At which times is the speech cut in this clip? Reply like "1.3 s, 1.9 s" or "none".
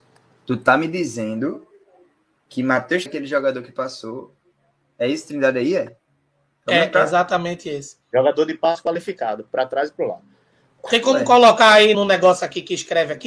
3.1 s, 11.9 s

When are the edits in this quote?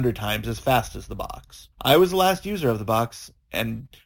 1.7 s

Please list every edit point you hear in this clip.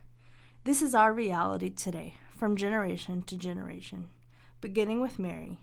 none

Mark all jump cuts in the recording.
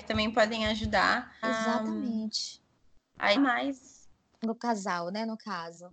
1.4 s, 3.4 s, 4.4 s

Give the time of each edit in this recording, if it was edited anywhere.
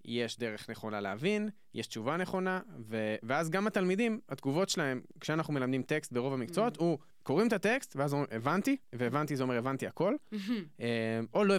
7.1 s, 8.8 s

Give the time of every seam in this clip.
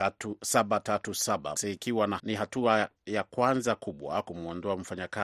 1.6 s, 2.2 s, 3.0 s

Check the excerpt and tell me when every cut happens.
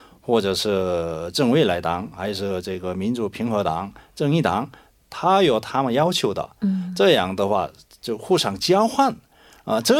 none

